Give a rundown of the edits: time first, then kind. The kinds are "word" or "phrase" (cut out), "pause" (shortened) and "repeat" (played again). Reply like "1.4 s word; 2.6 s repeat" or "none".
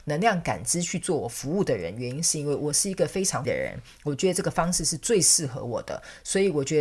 3.4 s word